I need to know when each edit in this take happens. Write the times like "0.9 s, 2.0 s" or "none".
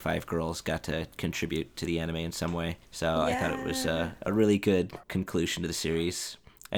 2.8 s, 5.0 s